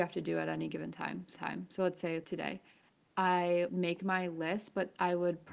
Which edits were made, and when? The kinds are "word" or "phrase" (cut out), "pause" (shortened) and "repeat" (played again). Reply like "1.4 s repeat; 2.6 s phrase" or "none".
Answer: 1.3 s repeat; 2.2 s word; 3.7 s word